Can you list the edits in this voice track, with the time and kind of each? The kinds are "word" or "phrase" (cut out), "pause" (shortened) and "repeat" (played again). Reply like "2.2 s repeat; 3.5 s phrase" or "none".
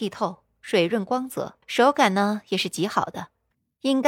1.6 s pause